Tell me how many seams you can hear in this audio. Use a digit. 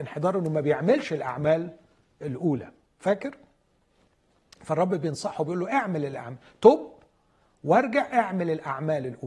0